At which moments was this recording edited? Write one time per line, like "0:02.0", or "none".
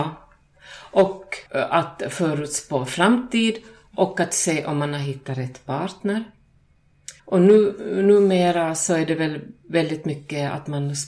0:01.5
0:07.2